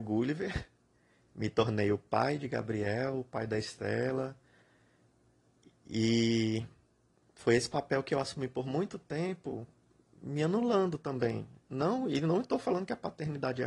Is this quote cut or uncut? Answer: uncut